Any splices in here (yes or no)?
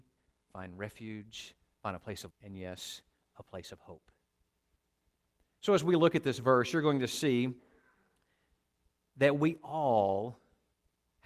yes